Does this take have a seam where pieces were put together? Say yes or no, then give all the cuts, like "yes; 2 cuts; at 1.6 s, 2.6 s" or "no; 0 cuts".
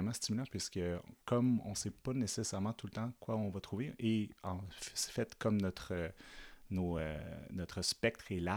yes; 1 cut; at 1.2 s